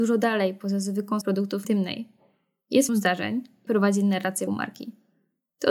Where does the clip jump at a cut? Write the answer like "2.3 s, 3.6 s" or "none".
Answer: 1.2 s, 1.6 s, 2.9 s, 3.7 s, 4.5 s